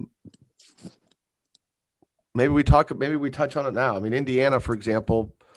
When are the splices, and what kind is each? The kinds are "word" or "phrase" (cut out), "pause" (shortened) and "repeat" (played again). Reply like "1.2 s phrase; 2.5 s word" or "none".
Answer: none